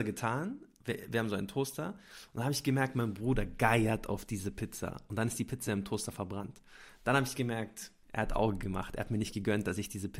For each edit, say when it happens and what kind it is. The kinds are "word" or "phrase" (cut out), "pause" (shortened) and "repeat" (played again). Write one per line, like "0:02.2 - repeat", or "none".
none